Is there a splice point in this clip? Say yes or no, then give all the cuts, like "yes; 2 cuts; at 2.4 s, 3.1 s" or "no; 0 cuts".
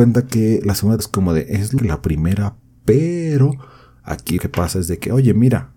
yes; 3 cuts; at 1.0 s, 1.8 s, 4.4 s